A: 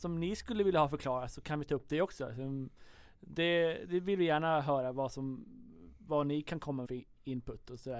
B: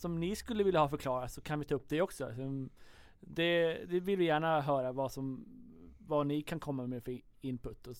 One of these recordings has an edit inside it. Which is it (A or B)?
A